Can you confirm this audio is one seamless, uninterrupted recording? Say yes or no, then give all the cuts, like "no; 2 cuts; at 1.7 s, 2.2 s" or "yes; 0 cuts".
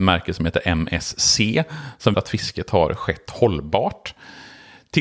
no; 1 cut; at 2.1 s